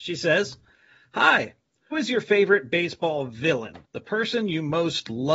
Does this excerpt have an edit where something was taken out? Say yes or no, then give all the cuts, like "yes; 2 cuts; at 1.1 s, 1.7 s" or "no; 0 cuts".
yes; 2 cuts; at 1.9 s, 3.8 s